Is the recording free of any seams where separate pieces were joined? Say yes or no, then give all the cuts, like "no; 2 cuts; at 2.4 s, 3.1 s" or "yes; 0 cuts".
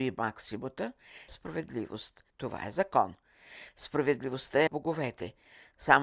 no; 3 cuts; at 1.3 s, 2.3 s, 4.7 s